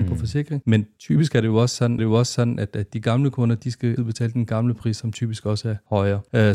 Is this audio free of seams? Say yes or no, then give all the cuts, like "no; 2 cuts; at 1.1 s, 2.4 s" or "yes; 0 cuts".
no; 2 cuts; at 2.0 s, 4.0 s